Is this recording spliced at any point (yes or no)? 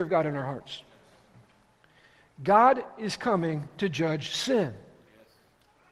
no